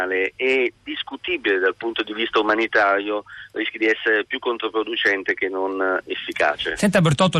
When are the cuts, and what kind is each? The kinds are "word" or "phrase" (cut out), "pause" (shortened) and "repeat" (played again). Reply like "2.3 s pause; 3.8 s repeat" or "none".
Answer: none